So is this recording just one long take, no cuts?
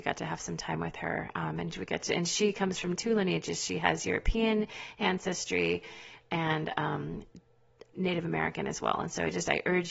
no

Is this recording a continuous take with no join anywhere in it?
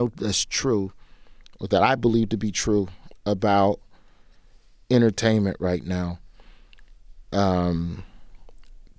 yes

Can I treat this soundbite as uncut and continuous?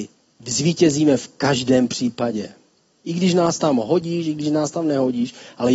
yes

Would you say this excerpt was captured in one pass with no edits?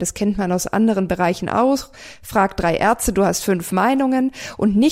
yes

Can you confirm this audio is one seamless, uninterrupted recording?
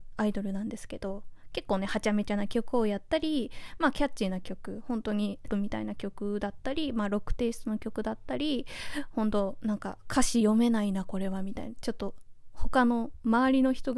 no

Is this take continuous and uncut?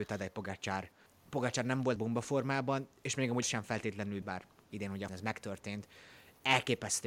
no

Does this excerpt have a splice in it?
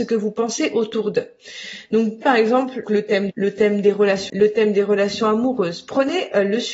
yes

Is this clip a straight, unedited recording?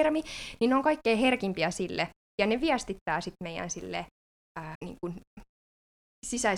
no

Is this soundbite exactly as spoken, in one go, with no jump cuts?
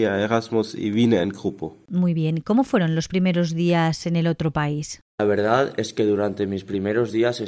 yes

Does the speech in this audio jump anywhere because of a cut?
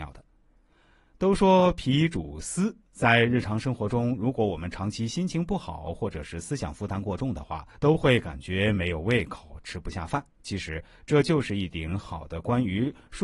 yes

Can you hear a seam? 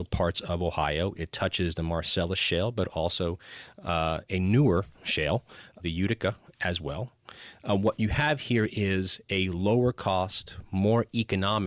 yes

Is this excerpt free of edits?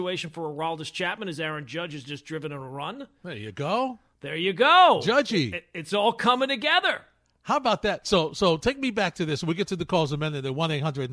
yes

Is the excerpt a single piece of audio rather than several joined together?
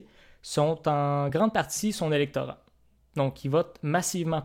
yes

